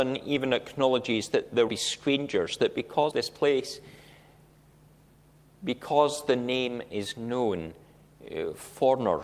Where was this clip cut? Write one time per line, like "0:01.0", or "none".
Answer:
0:01.7
0:03.1